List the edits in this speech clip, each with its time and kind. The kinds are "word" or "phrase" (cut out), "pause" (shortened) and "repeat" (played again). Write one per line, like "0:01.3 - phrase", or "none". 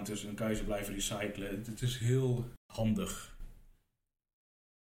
none

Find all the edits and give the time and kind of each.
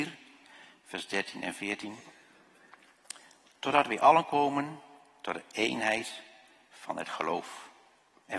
none

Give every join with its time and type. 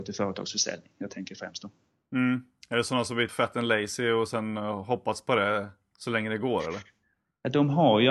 0:03.3 - word

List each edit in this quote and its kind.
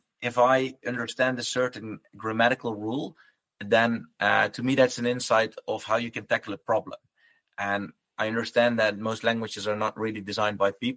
none

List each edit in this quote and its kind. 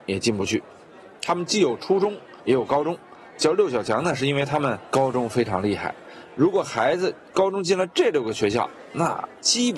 0:02.4 - pause
0:03.4 - word

